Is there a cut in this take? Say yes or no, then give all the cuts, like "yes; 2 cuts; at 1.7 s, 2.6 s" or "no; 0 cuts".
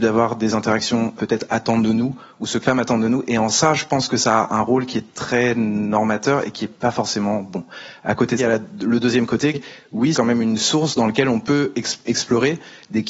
yes; 6 cuts; at 1.2 s, 2.6 s, 8.4 s, 9.5 s, 10.1 s, 12.0 s